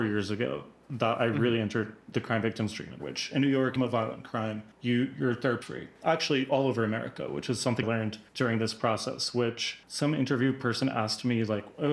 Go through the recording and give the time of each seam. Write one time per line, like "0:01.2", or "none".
0:03.0
0:03.8
0:04.7
0:05.6
0:07.8
0:08.3
0:09.8